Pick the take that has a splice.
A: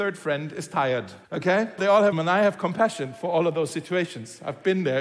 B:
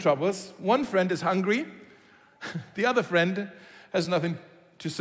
A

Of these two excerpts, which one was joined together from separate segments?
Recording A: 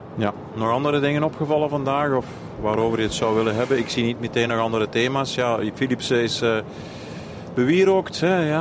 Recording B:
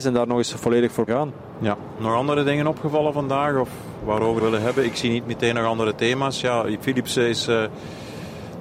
B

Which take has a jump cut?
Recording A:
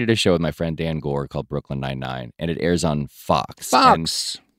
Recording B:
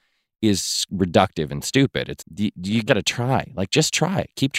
B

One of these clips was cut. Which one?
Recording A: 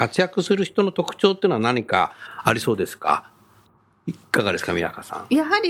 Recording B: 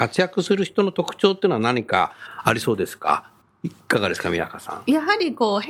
B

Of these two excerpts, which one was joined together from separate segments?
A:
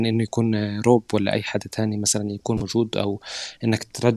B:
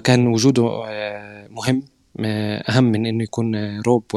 B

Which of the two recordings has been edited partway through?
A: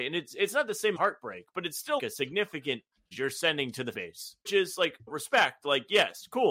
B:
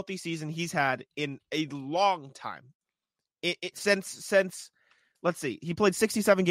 A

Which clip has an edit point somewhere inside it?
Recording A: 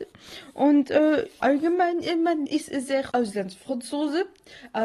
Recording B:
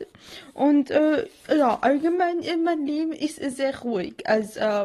A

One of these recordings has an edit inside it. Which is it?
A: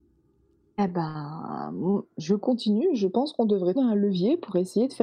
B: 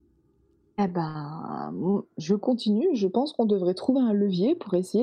A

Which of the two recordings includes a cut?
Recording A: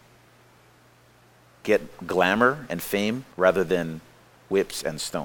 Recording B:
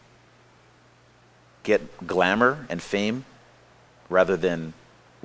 A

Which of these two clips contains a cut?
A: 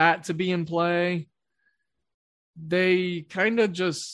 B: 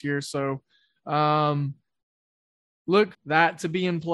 B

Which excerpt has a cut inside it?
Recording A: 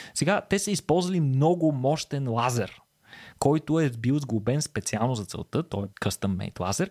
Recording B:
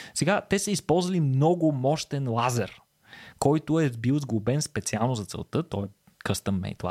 A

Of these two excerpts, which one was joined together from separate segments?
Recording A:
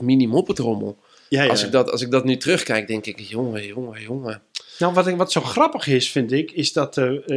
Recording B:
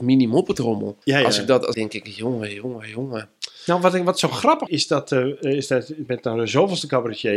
B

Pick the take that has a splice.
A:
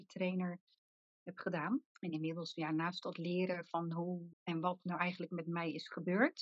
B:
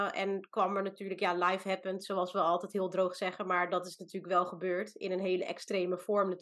A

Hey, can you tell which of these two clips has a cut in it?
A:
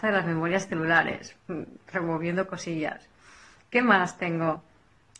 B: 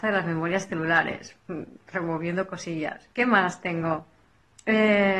B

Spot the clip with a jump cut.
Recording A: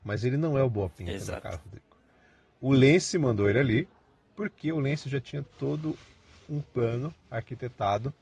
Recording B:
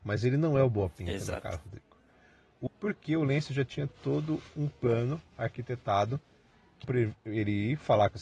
B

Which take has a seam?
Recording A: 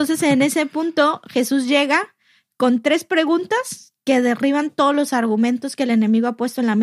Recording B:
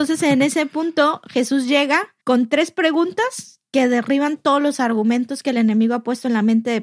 B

